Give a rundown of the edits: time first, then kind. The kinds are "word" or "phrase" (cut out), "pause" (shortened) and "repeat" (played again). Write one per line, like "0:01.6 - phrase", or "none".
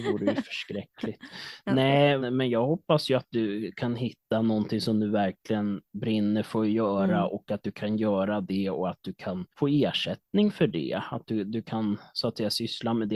0:02.2 - word
0:09.5 - pause